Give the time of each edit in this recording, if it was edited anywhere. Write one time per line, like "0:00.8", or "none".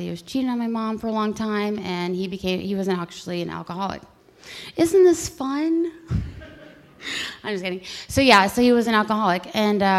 none